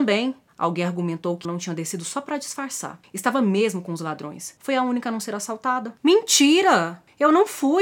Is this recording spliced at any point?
yes; 1 cut; at 1.4 s

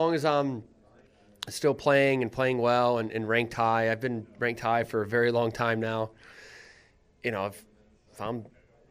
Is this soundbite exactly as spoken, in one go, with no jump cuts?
yes; 0 cuts

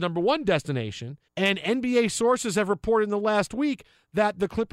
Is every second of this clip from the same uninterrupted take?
no; 1 cut; at 1.3 s

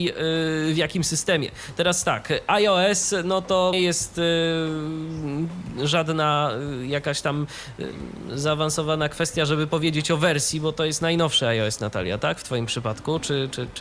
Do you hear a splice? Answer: yes; 1 cut; at 3.7 s

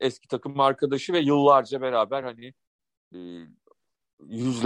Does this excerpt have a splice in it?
no; 0 cuts

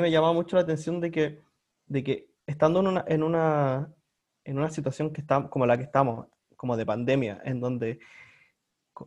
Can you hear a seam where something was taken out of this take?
no; 0 cuts

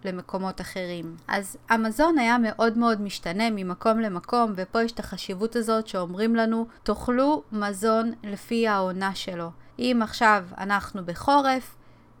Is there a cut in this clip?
yes; 3 cuts; at 1.2 s, 6.8 s, 9.7 s

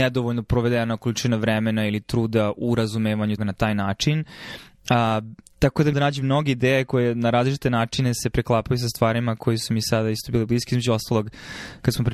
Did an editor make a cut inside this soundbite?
yes; 2 cuts; at 3.4 s, 5.9 s

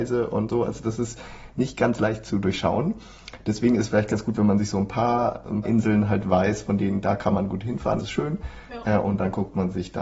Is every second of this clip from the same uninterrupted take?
no; 2 cuts; at 5.6 s, 8.0 s

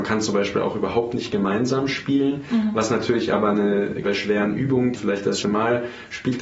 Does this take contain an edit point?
yes; 3 cuts; at 4.0 s, 5.0 s, 5.4 s

